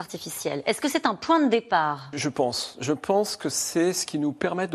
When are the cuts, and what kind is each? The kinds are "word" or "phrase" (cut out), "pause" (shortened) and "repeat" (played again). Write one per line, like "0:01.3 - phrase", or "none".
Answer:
0:02.1 - word